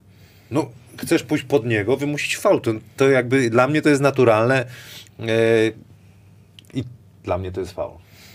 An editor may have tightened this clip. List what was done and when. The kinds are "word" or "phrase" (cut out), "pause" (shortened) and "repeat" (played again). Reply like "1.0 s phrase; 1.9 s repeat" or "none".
none